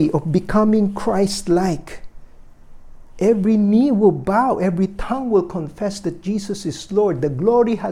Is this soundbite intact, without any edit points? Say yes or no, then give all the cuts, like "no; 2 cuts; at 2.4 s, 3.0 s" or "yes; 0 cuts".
yes; 0 cuts